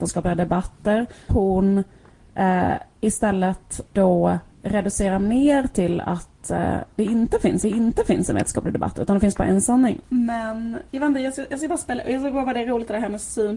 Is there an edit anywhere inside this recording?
yes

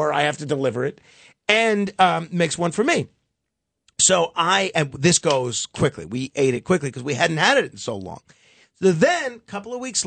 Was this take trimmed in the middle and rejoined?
no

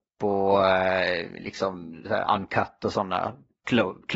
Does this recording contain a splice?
no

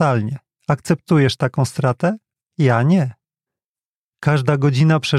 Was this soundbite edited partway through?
no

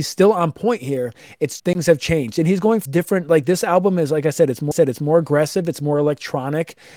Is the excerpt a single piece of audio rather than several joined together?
no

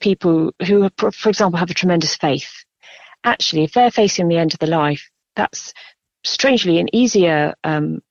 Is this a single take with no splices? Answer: yes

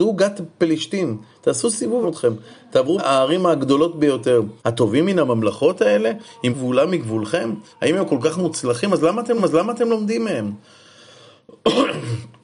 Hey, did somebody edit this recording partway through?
yes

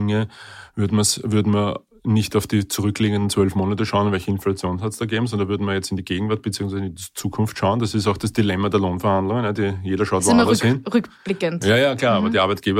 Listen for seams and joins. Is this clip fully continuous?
yes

